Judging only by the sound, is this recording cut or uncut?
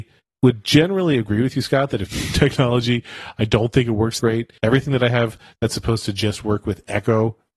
cut